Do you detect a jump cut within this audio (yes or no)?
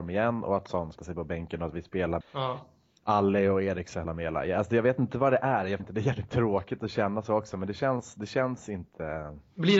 yes